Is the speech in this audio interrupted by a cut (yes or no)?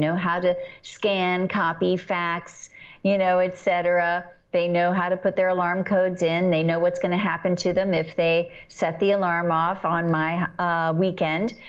no